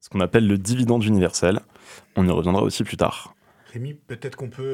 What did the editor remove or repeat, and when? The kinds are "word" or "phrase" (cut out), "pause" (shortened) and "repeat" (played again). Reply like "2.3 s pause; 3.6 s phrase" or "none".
2.1 s pause